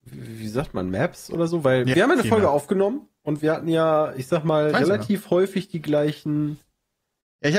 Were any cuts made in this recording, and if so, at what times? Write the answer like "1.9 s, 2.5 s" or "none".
1.9 s